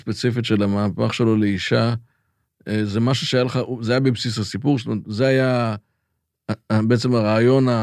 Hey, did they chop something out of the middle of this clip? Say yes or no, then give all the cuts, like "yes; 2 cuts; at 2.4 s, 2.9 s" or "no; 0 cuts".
no; 0 cuts